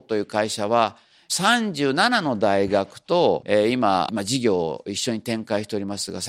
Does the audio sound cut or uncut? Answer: uncut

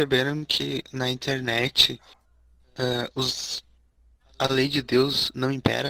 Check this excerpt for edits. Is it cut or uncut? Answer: cut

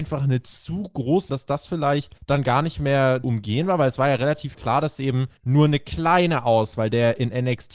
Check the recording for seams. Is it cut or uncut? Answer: cut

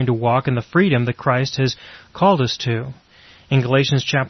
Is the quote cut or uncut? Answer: uncut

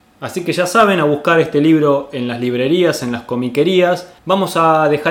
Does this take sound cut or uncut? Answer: cut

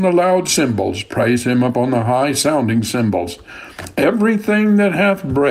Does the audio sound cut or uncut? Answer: uncut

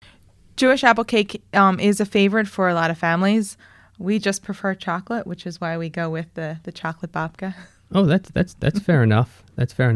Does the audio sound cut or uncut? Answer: uncut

